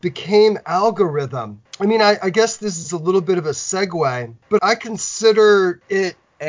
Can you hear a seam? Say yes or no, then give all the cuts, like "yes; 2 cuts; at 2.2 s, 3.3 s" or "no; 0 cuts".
yes; 1 cut; at 4.6 s